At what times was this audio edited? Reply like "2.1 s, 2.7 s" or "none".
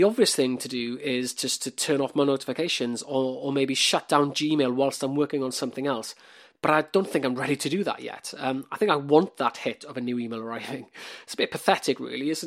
none